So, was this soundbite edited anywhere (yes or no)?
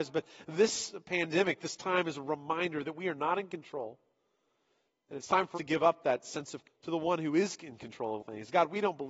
yes